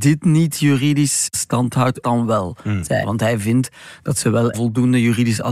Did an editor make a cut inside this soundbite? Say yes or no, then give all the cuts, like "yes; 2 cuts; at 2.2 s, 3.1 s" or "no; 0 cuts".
yes; 3 cuts; at 2.0 s, 3.0 s, 4.5 s